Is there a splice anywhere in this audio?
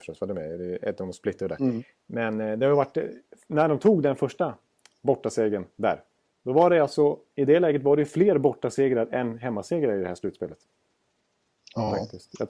no; 0 cuts

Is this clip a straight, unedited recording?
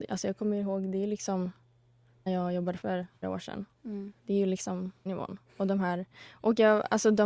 no; 6 cuts; at 2.3 s, 2.8 s, 3.2 s, 4.2 s, 5.1 s, 5.5 s

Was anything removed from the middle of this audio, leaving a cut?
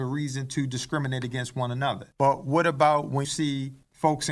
yes; 2 cuts; at 2.1 s, 3.2 s

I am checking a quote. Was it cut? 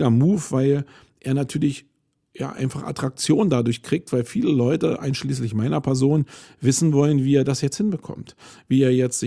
no; 0 cuts

